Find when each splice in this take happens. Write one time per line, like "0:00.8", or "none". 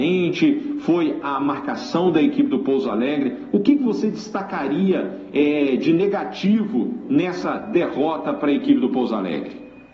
none